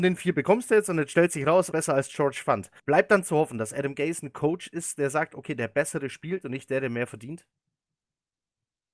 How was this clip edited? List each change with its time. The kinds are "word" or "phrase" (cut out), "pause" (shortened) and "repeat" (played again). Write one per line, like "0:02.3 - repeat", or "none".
0:01.7 - phrase
0:02.8 - pause